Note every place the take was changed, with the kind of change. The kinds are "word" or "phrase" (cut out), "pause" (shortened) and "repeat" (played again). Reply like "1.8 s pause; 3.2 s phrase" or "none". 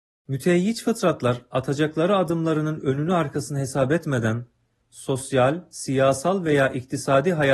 none